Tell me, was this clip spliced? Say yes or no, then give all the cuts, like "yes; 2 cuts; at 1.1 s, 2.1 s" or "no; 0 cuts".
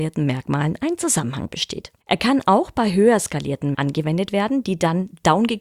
yes; 2 cuts; at 2.0 s, 3.7 s